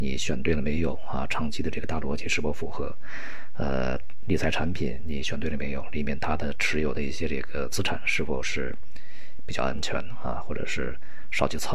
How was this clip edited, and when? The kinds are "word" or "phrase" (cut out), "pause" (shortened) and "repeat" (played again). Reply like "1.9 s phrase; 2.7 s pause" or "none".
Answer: none